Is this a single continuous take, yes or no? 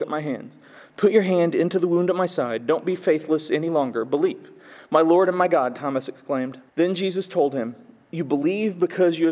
no